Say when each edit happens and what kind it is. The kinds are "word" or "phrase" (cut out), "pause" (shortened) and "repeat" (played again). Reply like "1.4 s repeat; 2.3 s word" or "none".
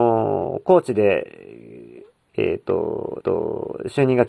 3.2 s repeat

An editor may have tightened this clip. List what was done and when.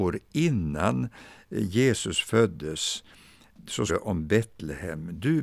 3.9 s word

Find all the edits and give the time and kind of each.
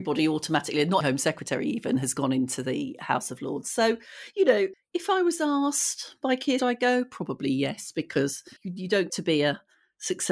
1.0 s word; 6.6 s phrase; 8.6 s pause; 9.1 s word

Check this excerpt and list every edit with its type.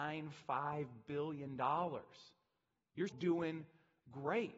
3.1 s word

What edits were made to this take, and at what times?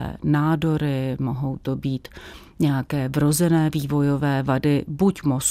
none

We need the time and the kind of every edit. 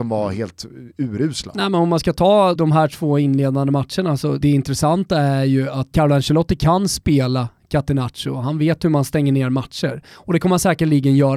2.5 s word; 4.4 s phrase; 5.9 s word

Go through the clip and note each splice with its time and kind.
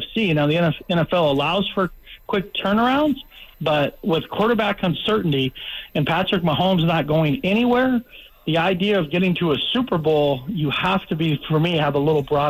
3.5 s pause

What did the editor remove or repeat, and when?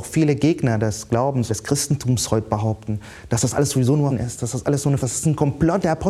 1.5 s word; 4.1 s word; 5.0 s phrase

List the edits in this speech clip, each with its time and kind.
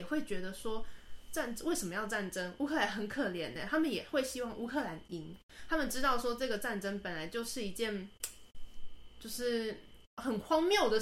10.1 s pause

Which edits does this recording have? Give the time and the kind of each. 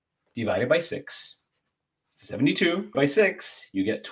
2.9 s word

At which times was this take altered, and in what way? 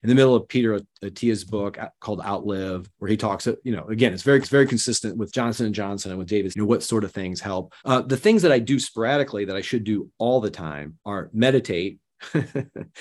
2.9 s pause; 4.4 s repeat; 5.3 s word; 6.5 s phrase; 7.8 s pause; 11.0 s pause

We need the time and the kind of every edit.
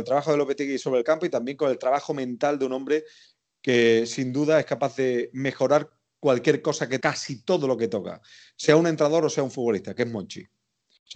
7.0 s word

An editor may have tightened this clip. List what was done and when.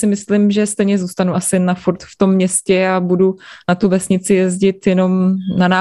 none

